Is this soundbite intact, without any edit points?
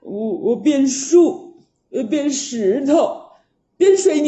yes; 0 cuts

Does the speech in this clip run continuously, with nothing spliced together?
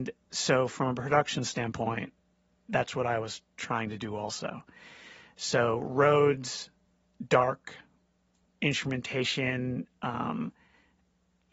yes; 0 cuts

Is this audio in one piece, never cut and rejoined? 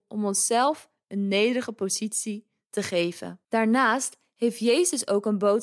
no; 1 cut; at 3.4 s

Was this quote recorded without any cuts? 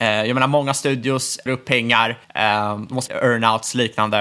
no; 3 cuts; at 1.5 s, 2.2 s, 3.1 s

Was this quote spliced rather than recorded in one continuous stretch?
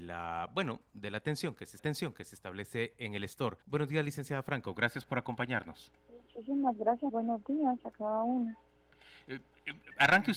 yes; 4 cuts; at 1.8 s, 3.6 s, 6.0 s, 7.1 s

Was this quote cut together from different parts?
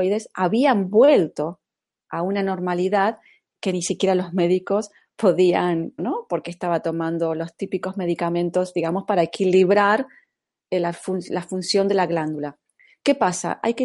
yes; 1 cut; at 6.0 s

